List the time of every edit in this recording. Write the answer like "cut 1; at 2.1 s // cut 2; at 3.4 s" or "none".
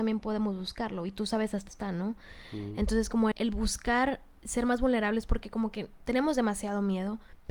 cut 1; at 1.7 s // cut 2; at 3.3 s